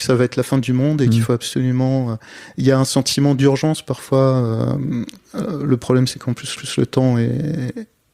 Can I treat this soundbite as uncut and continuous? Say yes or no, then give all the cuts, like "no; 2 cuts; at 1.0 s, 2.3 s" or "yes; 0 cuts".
no; 1 cut; at 6.6 s